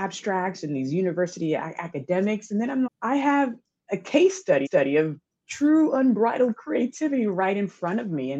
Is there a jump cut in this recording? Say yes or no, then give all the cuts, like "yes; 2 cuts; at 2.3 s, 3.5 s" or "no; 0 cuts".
yes; 2 cuts; at 2.9 s, 4.7 s